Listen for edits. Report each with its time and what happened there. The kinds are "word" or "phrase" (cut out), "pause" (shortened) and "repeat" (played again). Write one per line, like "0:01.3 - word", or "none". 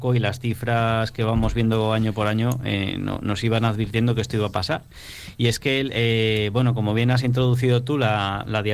none